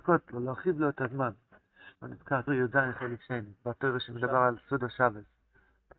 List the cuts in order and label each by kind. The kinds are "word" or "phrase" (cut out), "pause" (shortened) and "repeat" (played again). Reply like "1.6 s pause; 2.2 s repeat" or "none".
1.9 s pause; 2.5 s word; 3.6 s pause